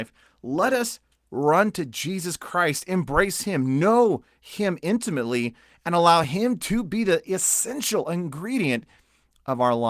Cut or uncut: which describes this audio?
uncut